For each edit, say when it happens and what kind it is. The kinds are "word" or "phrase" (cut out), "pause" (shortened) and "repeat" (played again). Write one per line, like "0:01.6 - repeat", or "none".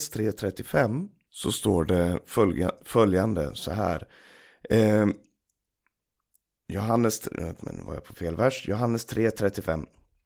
0:07.6 - word